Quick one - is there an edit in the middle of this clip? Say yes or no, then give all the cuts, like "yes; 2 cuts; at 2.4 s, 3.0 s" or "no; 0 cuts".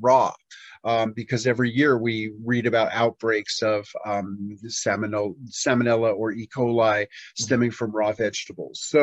no; 0 cuts